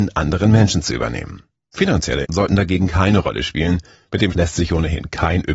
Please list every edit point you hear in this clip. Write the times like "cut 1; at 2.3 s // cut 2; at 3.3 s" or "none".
cut 1; at 2.2 s // cut 2; at 4.3 s